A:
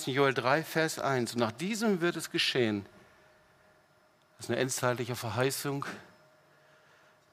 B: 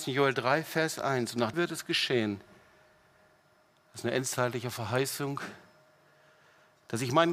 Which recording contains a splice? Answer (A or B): B